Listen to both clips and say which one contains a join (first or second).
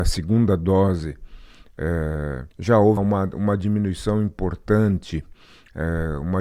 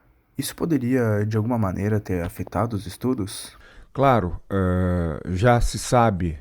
first